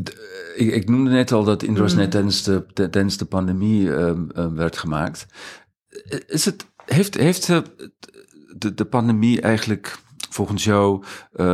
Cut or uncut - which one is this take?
uncut